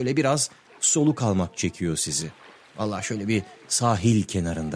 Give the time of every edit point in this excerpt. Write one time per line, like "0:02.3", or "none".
none